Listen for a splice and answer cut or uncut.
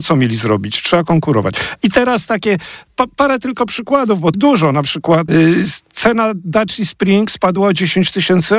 cut